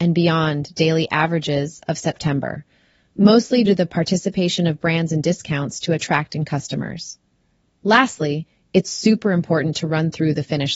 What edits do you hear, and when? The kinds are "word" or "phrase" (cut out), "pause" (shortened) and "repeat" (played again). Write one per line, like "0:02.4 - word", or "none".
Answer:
0:03.7 - word